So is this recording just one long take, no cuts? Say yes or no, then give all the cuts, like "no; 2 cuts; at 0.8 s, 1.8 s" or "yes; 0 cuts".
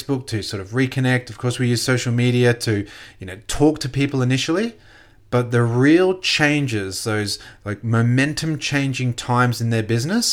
yes; 0 cuts